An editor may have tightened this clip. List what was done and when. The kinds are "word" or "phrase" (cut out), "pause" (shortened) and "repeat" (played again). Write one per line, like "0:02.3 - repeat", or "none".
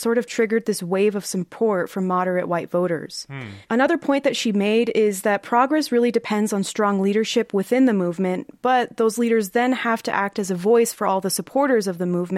0:03.6 - pause